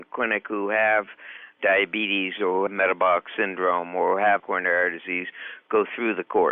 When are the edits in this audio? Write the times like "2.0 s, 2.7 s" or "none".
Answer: 2.7 s, 4.4 s